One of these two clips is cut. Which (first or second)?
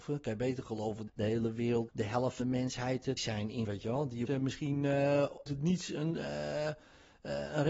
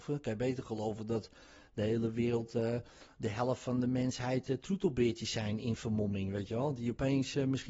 first